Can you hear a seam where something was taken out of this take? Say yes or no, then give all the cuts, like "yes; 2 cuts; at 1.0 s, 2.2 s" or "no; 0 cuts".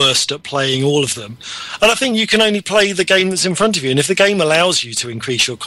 no; 0 cuts